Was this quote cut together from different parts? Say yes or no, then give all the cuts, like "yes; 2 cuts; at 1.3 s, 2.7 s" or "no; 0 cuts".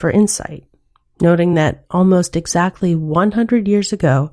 no; 0 cuts